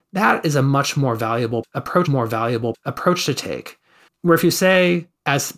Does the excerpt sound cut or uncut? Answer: cut